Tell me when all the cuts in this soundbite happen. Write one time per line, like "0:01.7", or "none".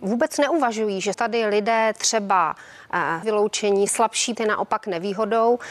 0:01.1
0:03.2
0:03.9
0:04.3